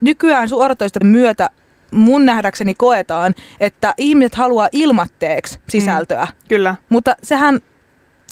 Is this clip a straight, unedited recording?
no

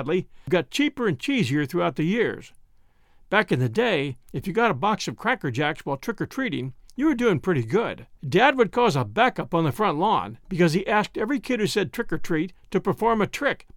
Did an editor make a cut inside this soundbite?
yes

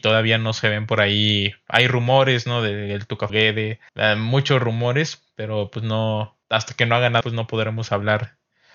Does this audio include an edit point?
yes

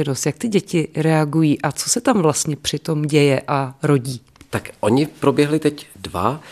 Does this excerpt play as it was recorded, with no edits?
yes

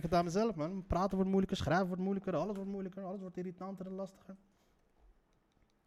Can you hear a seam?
no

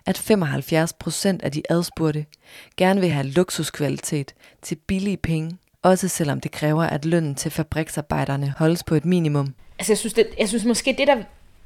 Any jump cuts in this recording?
no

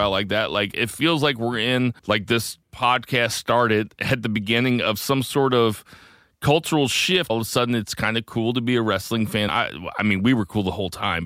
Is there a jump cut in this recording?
yes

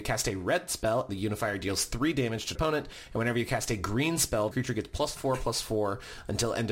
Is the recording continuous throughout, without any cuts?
no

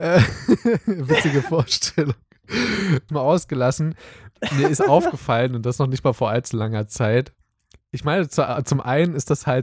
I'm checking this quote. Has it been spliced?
yes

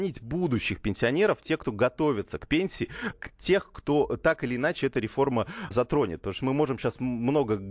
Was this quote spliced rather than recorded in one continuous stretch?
yes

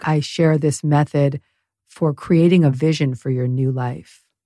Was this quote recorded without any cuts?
yes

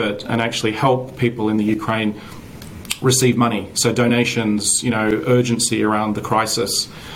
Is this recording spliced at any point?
no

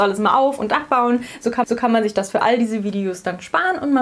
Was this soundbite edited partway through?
yes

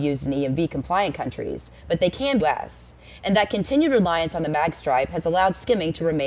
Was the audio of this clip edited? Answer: yes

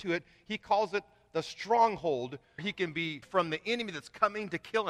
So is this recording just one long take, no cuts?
no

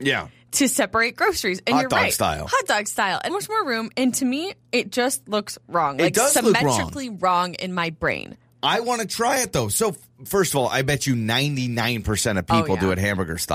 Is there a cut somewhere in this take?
yes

